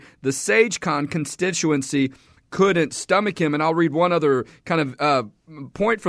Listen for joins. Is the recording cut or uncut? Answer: uncut